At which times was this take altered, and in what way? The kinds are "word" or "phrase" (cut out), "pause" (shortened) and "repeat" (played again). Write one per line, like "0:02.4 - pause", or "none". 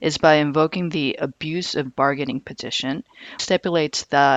0:01.9 - word
0:03.4 - word